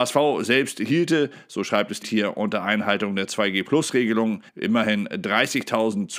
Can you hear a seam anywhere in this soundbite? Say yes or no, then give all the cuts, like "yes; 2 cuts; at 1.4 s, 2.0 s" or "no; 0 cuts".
yes; 2 cuts; at 2.0 s, 4.5 s